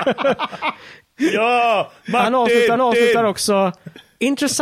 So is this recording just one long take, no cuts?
no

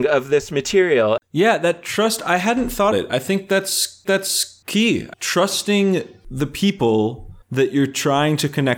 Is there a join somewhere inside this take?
yes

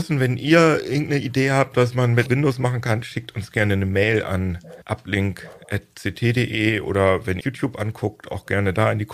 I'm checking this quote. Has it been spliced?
yes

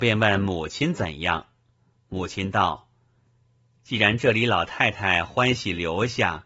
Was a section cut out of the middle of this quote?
no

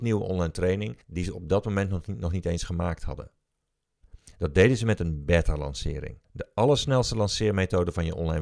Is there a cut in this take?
yes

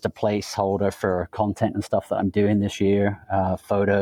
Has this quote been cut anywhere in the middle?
no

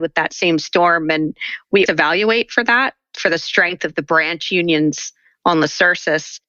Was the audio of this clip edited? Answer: yes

